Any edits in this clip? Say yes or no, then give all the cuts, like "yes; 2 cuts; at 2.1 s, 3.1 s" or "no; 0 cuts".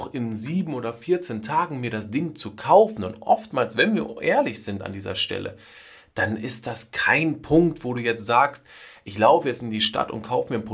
no; 0 cuts